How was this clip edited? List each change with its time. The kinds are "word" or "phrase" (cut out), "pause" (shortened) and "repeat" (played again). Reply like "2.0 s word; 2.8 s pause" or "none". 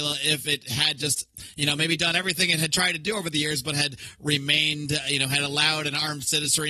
none